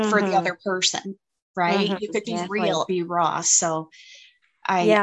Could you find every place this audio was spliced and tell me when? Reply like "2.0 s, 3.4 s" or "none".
2.2 s, 2.9 s